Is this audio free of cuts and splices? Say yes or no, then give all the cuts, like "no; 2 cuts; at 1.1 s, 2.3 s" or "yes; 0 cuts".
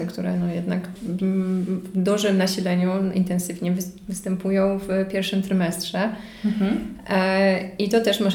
no; 1 cut; at 1.0 s